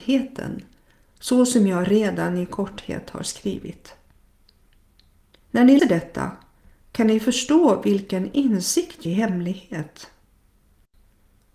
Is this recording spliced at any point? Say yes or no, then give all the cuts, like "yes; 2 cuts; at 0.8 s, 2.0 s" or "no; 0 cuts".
yes; 2 cuts; at 5.8 s, 9.1 s